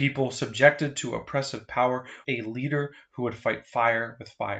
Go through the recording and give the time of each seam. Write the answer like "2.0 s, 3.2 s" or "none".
2.2 s